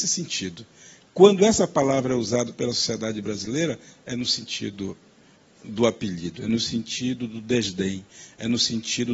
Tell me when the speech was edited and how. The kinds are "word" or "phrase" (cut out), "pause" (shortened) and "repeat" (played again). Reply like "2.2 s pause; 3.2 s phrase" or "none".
none

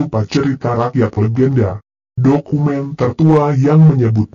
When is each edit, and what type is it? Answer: 1.2 s word

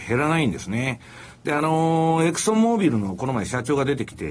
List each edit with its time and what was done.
none

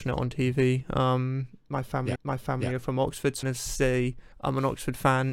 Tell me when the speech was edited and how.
2.2 s repeat; 3.4 s phrase; 4.3 s pause

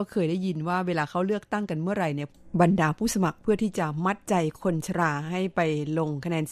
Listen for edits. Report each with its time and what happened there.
none

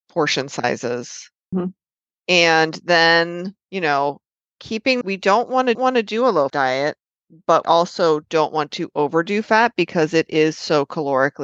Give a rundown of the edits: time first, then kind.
1.5 s word; 3.6 s pause; 5.0 s phrase; 5.7 s repeat; 6.5 s word; 7.6 s word

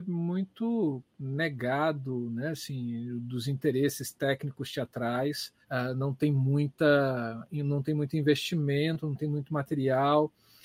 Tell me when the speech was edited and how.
5.6 s pause

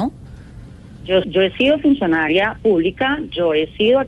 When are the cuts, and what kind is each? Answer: 1.2 s word

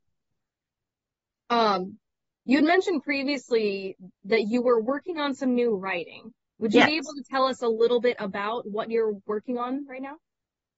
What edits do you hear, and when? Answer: 4.1 s pause; 6.5 s pause

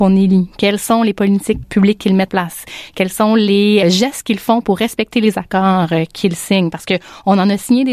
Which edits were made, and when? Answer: 1.6 s word; 2.3 s word; 3.8 s word

